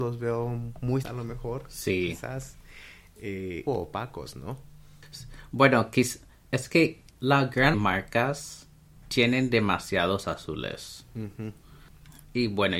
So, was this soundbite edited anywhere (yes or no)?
yes